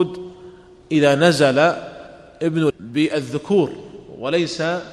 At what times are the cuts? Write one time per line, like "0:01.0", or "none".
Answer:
0:02.7